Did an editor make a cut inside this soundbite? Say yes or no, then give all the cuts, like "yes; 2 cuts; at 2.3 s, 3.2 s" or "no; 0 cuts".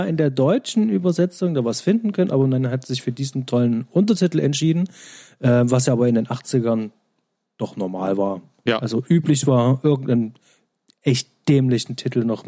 no; 0 cuts